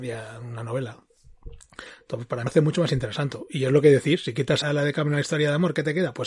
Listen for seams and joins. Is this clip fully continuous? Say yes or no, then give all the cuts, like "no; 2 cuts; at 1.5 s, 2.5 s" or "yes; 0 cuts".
no; 2 cuts; at 2.5 s, 4.6 s